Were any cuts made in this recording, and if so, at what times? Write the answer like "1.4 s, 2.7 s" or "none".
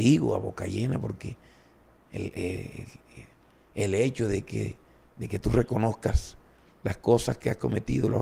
none

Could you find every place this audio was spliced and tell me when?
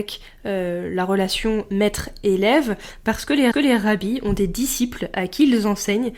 3.5 s

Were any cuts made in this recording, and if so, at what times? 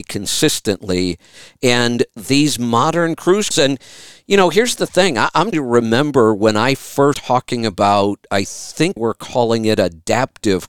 3.5 s, 5.5 s, 7.1 s, 9.0 s

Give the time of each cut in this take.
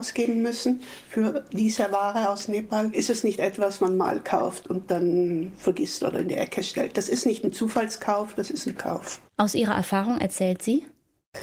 3.8 s, 8.7 s, 9.3 s

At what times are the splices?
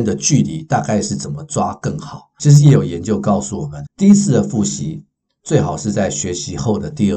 3.9 s

